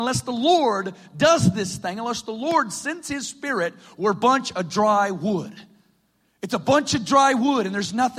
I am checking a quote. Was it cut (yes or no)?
no